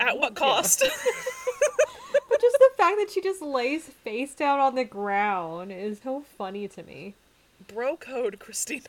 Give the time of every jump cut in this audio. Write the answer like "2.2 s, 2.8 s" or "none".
6.0 s